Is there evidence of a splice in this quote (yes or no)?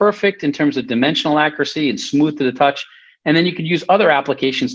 no